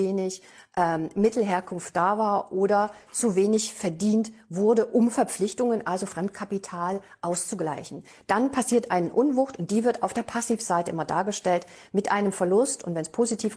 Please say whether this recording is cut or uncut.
uncut